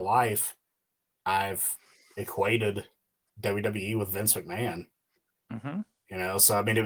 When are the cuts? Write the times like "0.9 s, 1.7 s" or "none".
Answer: none